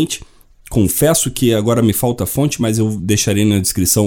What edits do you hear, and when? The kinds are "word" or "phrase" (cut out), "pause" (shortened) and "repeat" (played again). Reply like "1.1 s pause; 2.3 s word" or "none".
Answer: none